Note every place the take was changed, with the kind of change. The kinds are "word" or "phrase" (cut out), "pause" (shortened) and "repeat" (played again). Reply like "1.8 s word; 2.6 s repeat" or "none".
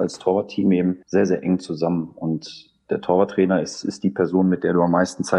1.0 s pause

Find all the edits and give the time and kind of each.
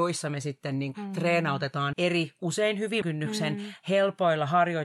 0.9 s word; 1.9 s word; 3.0 s word

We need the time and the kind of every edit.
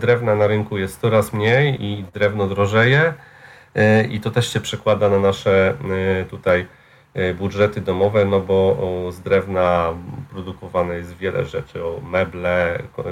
1.8 s word; 4.1 s word

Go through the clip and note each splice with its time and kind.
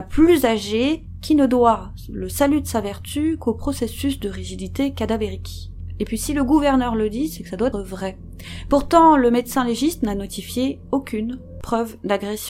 7.7 s word

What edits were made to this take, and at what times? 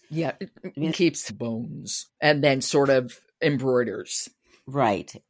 0.9 s phrase; 1.3 s word; 2.1 s pause

